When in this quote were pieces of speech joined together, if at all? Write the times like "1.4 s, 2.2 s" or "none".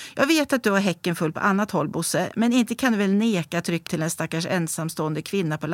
3.9 s